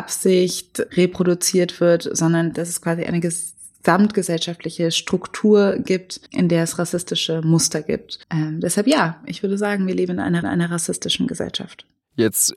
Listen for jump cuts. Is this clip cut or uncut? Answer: cut